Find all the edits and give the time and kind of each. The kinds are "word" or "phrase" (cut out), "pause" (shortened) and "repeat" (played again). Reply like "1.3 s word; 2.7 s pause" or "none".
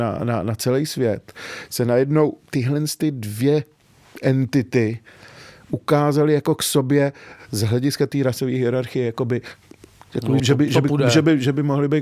10.4 s word